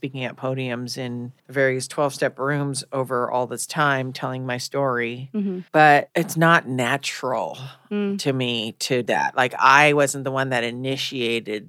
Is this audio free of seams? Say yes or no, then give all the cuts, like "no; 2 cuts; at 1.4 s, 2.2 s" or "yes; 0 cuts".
no; 3 cuts; at 1.4 s, 5.7 s, 9.1 s